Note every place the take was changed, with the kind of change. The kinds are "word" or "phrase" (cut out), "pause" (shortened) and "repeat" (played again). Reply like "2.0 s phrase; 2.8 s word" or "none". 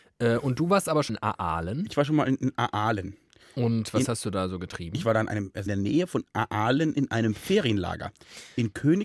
1.1 s word; 5.7 s word